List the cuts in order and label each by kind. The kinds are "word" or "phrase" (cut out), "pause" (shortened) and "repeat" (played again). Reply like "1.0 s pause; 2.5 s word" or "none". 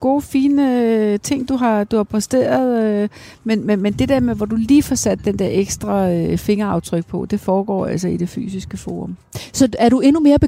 none